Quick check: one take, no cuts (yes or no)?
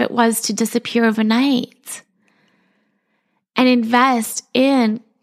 yes